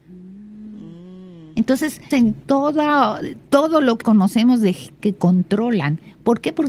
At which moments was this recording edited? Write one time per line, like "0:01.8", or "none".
0:02.1
0:04.0
0:05.0